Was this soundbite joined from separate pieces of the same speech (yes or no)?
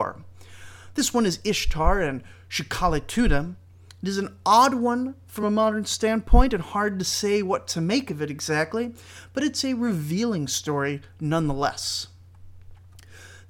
no